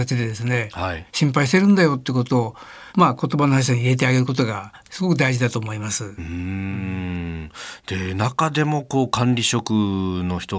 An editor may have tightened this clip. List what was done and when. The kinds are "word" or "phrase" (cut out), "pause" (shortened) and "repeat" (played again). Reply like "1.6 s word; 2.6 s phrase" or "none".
2.9 s pause